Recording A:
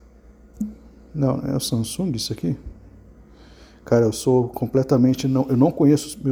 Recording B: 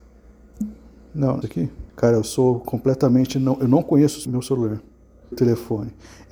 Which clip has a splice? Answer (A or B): B